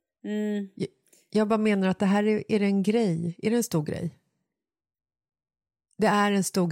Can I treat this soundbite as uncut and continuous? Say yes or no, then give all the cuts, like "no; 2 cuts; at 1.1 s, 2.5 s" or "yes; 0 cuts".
yes; 0 cuts